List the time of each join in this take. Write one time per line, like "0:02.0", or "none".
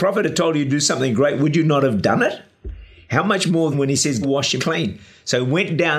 0:03.7
0:04.2
0:04.6